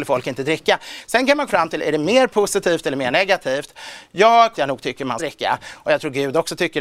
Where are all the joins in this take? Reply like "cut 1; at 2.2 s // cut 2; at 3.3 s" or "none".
cut 1; at 1.5 s // cut 2; at 4.5 s // cut 3; at 5.2 s